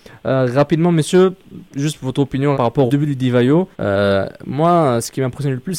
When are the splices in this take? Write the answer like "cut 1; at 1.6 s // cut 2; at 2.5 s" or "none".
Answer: cut 1; at 1.7 s // cut 2; at 2.5 s // cut 3; at 2.9 s // cut 4; at 3.7 s